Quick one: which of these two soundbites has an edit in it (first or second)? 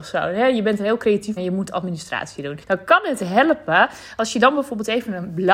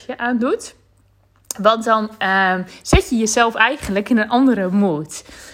first